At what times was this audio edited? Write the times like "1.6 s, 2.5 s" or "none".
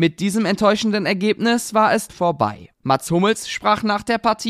2.1 s, 2.7 s